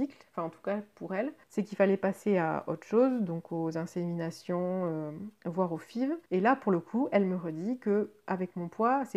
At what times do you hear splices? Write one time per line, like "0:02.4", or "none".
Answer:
0:01.4
0:06.3

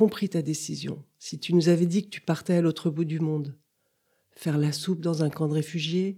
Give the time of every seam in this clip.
none

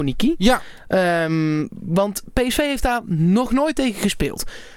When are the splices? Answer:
none

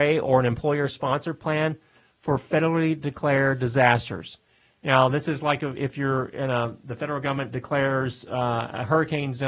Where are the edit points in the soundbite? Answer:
none

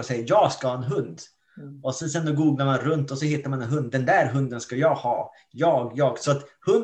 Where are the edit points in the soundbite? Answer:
none

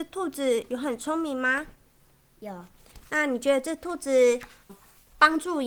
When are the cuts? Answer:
0:04.7

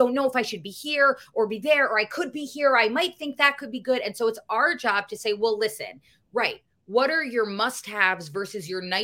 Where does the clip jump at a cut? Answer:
none

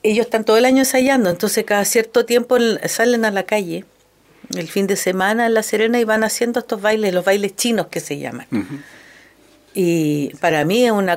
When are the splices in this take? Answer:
none

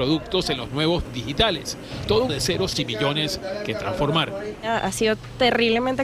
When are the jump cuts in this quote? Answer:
0:01.1
0:02.3
0:02.7

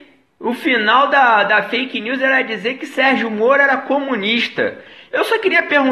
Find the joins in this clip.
none

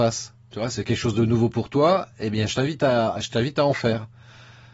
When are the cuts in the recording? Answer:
none

